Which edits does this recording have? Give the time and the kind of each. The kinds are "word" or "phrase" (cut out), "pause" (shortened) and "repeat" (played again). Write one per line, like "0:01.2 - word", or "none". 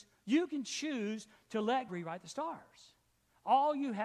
0:01.9 - word